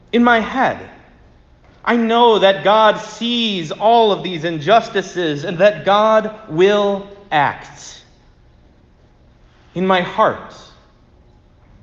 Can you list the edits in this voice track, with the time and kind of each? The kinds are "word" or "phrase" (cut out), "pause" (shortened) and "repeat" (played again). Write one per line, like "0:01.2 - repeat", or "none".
none